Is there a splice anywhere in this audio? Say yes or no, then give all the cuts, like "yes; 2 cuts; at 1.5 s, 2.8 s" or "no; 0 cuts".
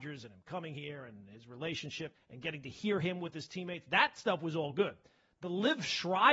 yes; 1 cut; at 2.2 s